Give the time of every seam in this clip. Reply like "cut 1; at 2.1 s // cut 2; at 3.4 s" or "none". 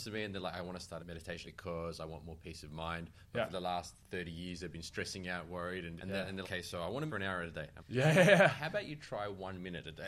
cut 1; at 1.0 s // cut 2; at 1.4 s // cut 3; at 6.0 s // cut 4; at 6.4 s // cut 5; at 7.1 s // cut 6; at 7.8 s

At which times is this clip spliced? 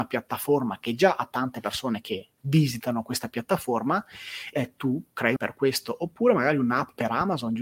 cut 1; at 2.4 s // cut 2; at 4.5 s // cut 3; at 5.4 s

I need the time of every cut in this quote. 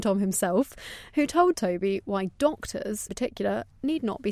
cut 1; at 3.1 s

